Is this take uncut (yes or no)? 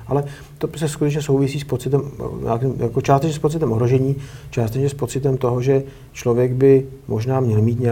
yes